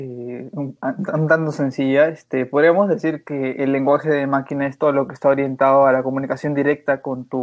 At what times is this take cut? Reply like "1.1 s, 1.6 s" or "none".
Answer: none